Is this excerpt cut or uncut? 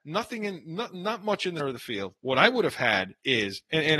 cut